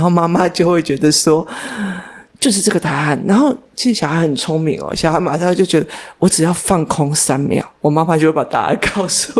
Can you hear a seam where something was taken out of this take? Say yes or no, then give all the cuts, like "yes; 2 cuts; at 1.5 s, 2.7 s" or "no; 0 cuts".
yes; 1 cut; at 7.7 s